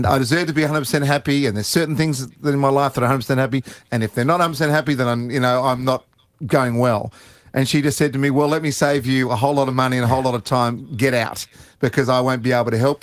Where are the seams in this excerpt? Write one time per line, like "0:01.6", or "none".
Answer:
none